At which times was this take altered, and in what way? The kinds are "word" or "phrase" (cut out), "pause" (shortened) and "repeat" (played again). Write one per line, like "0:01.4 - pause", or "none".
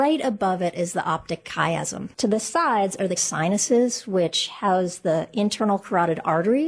0:02.1 - pause
0:03.2 - word